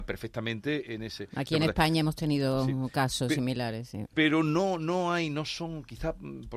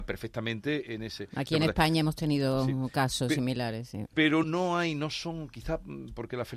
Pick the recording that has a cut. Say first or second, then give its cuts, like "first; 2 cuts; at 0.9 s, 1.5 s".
second; 1 cut; at 4.4 s